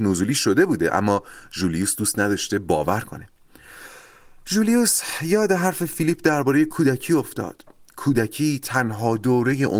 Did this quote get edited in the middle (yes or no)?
no